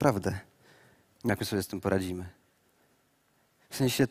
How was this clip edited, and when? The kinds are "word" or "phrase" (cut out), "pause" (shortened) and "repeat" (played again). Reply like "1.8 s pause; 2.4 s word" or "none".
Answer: 1.3 s word